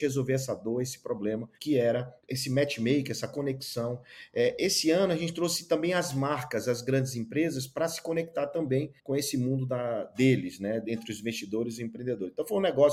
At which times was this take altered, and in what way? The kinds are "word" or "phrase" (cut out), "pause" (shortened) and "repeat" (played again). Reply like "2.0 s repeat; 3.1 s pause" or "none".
1.5 s pause; 2.2 s pause; 9.0 s pause